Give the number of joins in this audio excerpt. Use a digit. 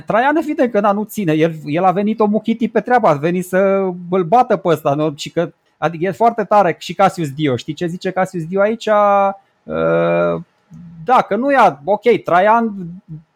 0